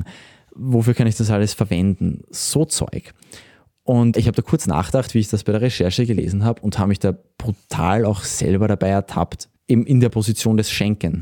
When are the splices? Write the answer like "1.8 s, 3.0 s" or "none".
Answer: 9.6 s